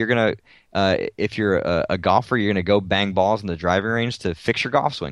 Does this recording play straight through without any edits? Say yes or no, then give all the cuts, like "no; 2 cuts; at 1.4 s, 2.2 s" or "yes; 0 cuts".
yes; 0 cuts